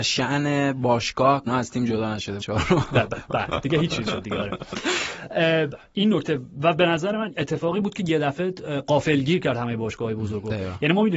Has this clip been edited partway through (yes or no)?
yes